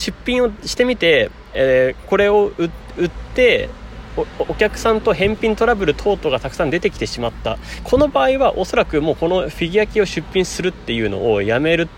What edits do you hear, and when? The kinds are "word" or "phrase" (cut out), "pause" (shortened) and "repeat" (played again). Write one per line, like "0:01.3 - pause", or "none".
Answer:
none